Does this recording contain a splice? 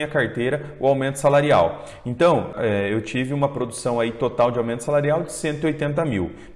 no; 0 cuts

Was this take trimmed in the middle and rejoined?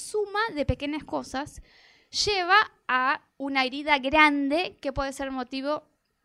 no; 0 cuts

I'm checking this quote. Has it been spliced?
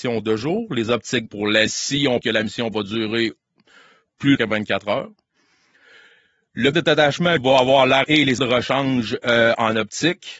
yes; 8 cuts; at 1.3 s, 1.7 s, 2.2 s, 4.3 s, 6.7 s, 7.4 s, 8.0 s, 8.4 s

